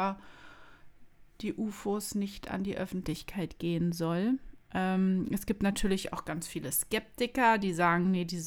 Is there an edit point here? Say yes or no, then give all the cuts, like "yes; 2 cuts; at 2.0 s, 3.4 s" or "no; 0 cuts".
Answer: no; 0 cuts